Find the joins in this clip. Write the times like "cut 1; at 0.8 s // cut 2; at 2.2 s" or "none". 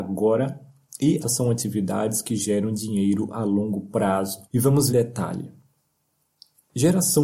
cut 1; at 1.2 s // cut 2; at 4.4 s // cut 3; at 4.9 s